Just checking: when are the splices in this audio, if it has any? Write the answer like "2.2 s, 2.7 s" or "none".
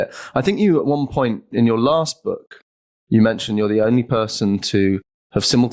none